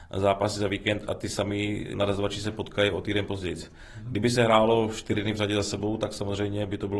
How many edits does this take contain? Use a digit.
1